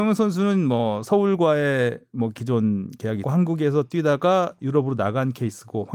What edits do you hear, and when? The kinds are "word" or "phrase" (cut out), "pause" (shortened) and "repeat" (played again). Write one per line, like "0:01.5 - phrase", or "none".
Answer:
0:03.2 - word